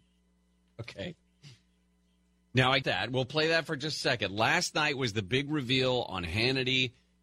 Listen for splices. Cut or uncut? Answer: cut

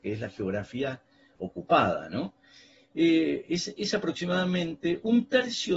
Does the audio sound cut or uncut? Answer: uncut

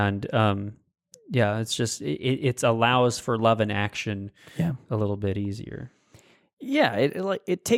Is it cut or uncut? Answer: uncut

